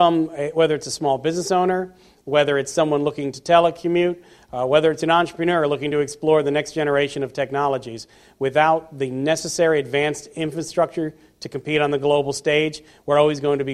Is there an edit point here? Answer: no; 0 cuts

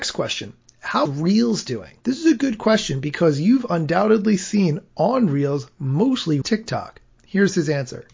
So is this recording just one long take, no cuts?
no; 3 cuts; at 1.1 s, 2.0 s, 6.4 s

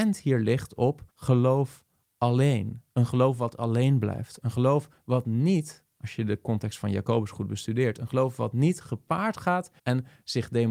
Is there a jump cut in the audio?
yes; 2 cuts; at 1.1 s, 9.8 s

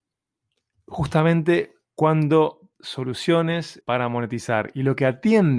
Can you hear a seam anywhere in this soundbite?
yes; 2 cuts; at 2.7 s, 3.8 s

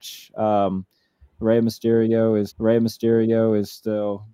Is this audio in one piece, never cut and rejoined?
no; 1 cut; at 2.5 s

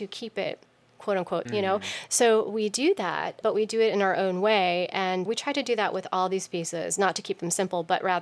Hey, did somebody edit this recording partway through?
yes; 3 cuts; at 1.5 s, 3.4 s, 5.3 s

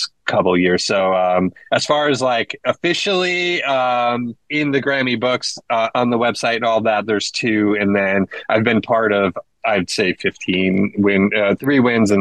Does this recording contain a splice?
yes; 1 cut; at 4.4 s

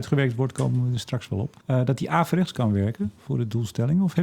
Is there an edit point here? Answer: yes; 1 cut; at 1.6 s

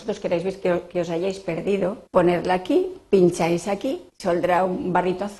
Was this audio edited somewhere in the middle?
yes; 2 cuts; at 2.1 s, 4.1 s

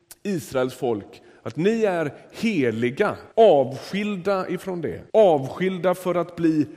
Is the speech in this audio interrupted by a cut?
yes; 2 cuts; at 3.3 s, 5.1 s

